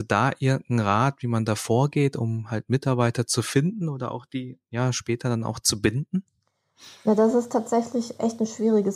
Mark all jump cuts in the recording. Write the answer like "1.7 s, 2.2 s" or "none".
none